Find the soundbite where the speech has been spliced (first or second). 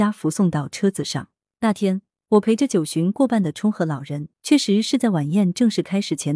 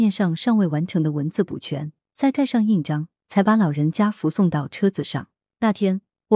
first